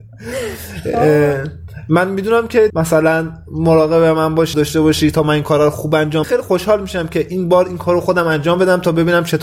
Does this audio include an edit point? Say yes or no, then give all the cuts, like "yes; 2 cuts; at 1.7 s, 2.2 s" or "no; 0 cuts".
yes; 3 cuts; at 2.7 s, 4.5 s, 6.2 s